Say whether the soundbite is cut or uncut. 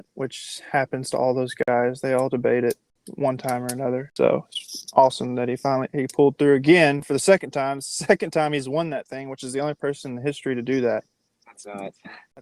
uncut